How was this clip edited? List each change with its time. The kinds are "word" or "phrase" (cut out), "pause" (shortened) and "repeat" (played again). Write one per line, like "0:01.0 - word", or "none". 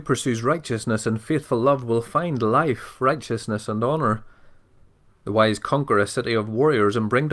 none